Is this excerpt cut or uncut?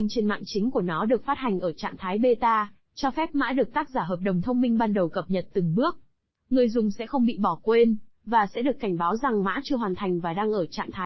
uncut